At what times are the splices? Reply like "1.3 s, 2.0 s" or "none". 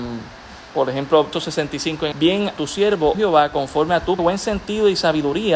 1.3 s, 2.1 s, 2.6 s, 3.1 s, 4.2 s